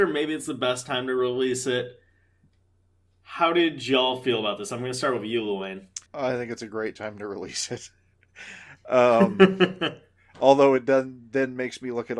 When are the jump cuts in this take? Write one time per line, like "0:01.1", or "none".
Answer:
0:06.1